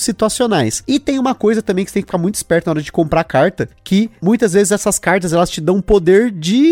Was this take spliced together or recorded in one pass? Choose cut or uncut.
uncut